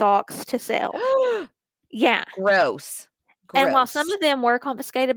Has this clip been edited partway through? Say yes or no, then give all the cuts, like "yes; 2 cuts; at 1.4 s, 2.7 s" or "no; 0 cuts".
no; 0 cuts